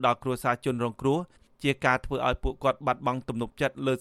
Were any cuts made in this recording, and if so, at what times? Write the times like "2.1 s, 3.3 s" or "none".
none